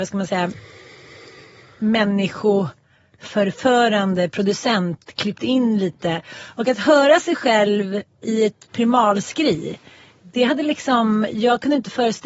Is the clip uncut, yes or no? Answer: yes